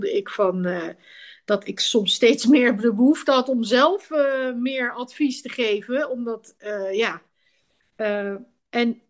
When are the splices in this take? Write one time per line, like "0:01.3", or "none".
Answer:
none